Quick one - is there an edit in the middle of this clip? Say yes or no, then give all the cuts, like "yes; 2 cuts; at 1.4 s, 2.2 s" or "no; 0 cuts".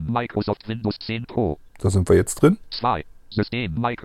yes; 1 cut; at 1.7 s